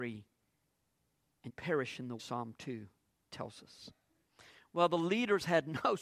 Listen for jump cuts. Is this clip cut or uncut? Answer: cut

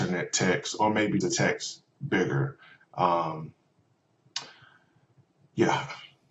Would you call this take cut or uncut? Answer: cut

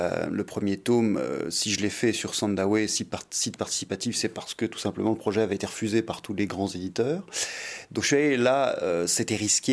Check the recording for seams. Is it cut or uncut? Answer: uncut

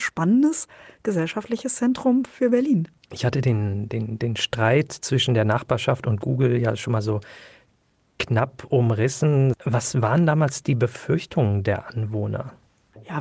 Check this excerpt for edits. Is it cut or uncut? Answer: uncut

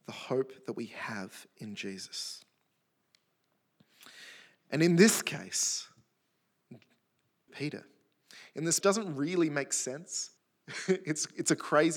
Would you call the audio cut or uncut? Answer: cut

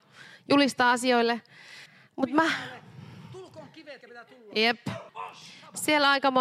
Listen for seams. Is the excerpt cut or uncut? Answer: cut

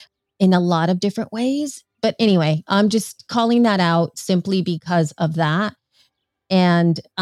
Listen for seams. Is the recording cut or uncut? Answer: uncut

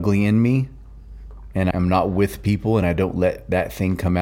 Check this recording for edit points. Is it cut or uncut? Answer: cut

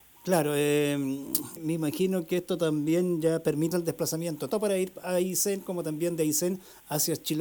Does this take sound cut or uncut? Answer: cut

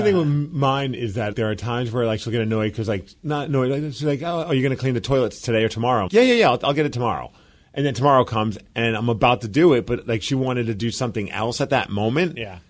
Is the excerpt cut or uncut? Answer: cut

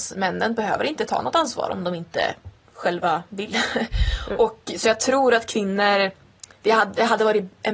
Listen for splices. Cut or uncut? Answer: uncut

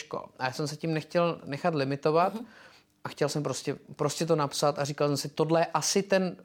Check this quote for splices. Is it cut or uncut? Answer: uncut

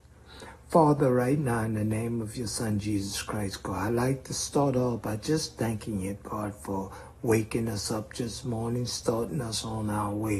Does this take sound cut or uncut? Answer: uncut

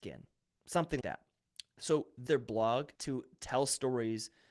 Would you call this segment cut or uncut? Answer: cut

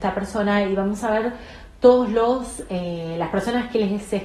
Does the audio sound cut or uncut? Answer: uncut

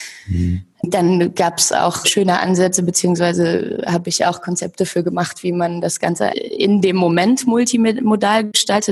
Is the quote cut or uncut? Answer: cut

